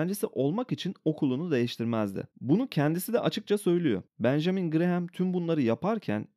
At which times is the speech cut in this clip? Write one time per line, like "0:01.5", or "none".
0:02.3
0:04.1